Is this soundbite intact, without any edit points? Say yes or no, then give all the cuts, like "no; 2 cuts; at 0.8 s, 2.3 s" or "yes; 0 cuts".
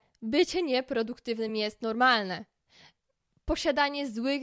yes; 0 cuts